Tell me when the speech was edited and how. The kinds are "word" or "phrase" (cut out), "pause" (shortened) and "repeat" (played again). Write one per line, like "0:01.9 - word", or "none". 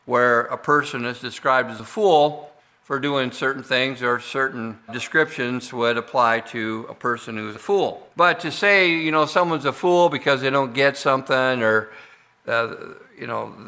0:04.9 - word
0:07.5 - word
0:08.1 - pause